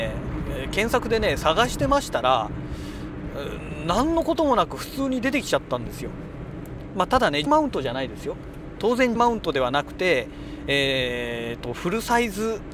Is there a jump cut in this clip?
yes; 2 cuts; at 7.5 s, 9.2 s

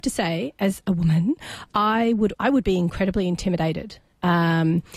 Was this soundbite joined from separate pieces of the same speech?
yes; 1 cut; at 2.3 s

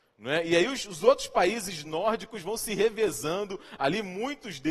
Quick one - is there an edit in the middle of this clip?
no; 0 cuts

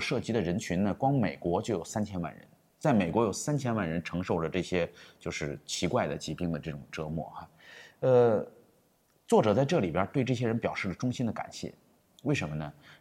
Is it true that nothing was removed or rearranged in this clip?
yes; 0 cuts

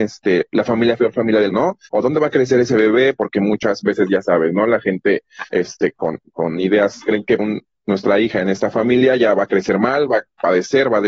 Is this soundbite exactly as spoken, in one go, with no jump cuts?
no; 6 cuts; at 1.0 s, 1.5 s, 1.9 s, 5.5 s, 7.0 s, 7.4 s

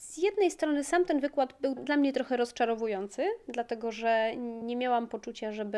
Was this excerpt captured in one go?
no; 2 cuts; at 1.8 s, 4.6 s

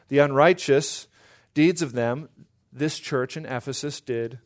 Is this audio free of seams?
yes; 0 cuts

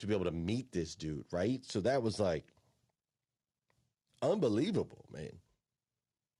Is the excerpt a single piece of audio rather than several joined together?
yes; 0 cuts

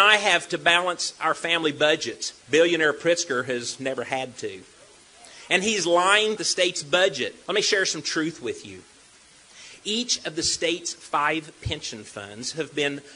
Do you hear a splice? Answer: yes; 3 cuts; at 2.4 s, 6.4 s, 7.4 s

